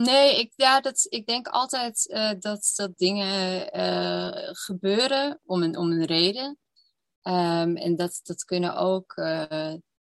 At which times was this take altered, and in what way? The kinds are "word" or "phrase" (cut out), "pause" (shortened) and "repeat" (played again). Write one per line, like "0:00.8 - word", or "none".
none